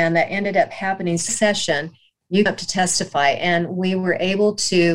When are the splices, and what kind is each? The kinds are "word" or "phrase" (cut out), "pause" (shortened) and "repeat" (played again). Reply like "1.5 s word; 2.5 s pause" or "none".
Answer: 1.3 s phrase; 2.5 s word